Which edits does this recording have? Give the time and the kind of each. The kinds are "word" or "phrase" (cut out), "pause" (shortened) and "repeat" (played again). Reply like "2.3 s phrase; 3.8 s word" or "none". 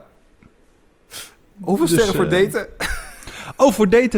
none